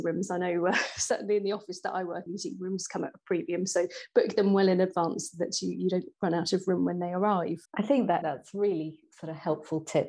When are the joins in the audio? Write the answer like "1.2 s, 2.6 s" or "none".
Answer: 2.3 s, 7.7 s, 8.2 s